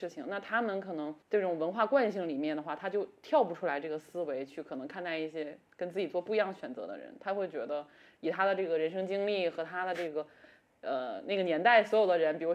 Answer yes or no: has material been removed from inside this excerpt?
yes